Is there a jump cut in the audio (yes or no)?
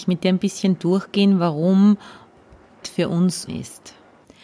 yes